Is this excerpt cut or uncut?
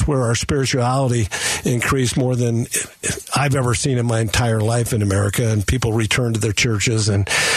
uncut